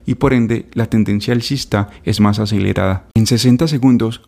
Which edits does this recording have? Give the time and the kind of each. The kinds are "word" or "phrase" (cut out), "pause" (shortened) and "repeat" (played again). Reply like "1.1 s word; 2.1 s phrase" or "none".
3.1 s pause